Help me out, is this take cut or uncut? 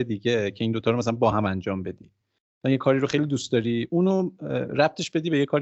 uncut